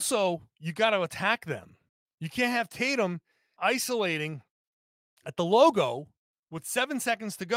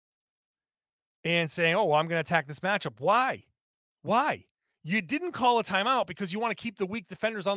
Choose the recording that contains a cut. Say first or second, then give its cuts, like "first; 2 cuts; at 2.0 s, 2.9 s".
first; 2 cuts; at 1.9 s, 3.6 s